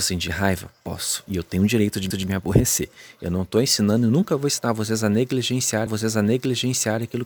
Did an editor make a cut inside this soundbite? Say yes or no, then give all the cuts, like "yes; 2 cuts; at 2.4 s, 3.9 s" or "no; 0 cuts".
yes; 2 cuts; at 2.1 s, 5.9 s